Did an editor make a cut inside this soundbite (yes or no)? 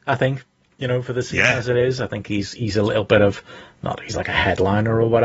no